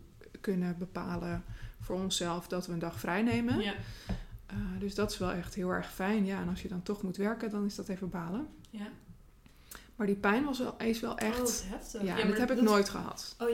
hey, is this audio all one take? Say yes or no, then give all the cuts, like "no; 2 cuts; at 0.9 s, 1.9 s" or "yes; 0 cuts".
yes; 0 cuts